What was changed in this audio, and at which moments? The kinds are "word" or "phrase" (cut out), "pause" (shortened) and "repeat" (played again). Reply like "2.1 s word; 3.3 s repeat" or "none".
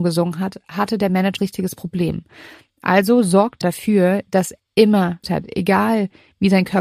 1.4 s word; 3.6 s word; 4.6 s word; 5.2 s word